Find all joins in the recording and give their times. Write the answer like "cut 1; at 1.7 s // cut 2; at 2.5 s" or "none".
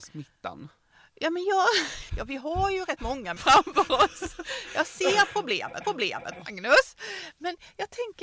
cut 1; at 2.1 s // cut 2; at 3.4 s // cut 3; at 5.8 s